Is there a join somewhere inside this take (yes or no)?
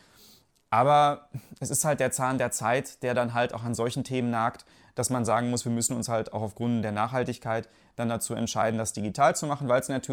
no